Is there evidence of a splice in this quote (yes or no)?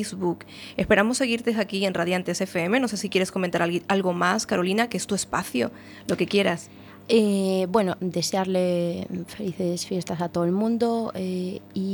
no